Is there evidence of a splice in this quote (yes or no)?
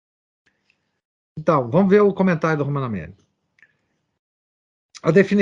no